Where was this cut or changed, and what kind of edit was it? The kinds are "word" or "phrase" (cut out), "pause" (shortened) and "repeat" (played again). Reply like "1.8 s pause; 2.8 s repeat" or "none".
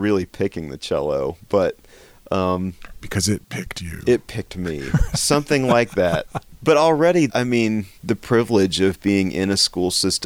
7.3 s word; 8.0 s pause